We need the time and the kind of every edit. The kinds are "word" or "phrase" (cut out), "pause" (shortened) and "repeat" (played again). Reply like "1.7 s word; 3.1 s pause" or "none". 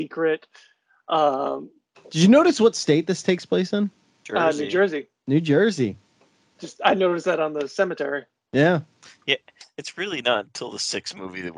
none